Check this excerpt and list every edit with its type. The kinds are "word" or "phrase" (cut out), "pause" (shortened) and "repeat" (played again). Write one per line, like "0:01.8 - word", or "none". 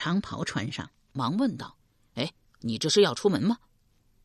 0:01.8 - pause